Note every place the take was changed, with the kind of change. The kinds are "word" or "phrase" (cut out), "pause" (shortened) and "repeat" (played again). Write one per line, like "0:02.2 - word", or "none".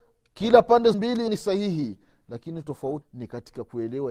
0:00.9 - word
0:01.3 - word
0:03.0 - word